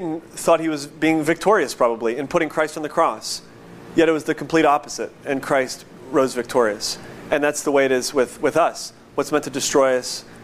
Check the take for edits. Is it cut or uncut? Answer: uncut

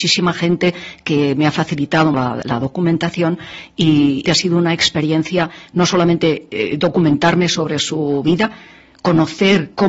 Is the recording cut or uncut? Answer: cut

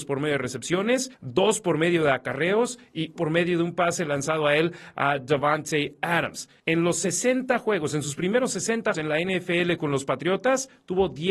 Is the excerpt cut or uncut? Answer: cut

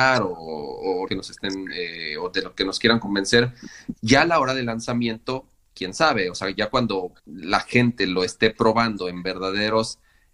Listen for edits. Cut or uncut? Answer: cut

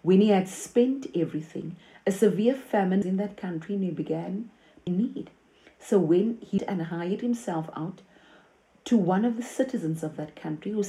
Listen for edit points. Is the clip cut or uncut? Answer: cut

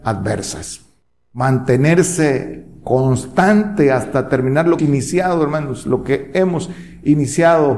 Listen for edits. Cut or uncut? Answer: cut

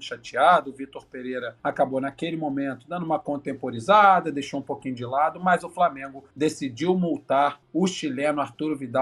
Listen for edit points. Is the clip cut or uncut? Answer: cut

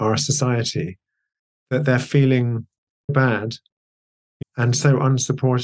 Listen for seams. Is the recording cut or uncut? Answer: cut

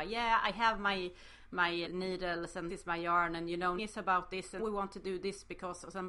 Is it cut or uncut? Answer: cut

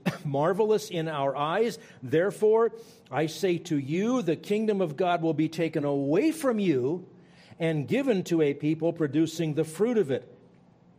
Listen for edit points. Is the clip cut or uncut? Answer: uncut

